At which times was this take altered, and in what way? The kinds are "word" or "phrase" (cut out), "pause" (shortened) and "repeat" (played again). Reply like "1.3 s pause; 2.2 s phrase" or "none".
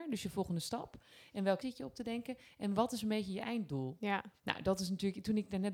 1.6 s word